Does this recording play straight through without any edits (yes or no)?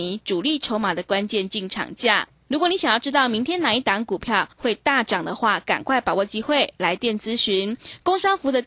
yes